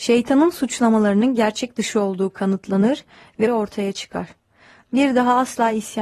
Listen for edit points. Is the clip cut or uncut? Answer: cut